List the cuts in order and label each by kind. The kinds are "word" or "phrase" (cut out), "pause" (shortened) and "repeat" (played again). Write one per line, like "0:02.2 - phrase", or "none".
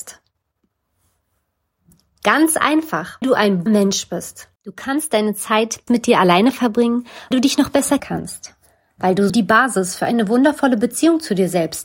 0:03.2 - word
0:03.7 - word
0:04.6 - pause
0:05.9 - word
0:07.3 - word
0:08.0 - word
0:09.3 - word